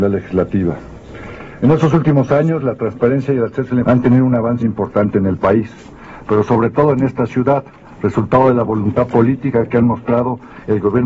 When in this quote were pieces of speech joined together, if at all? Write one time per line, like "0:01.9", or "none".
0:03.8
0:04.6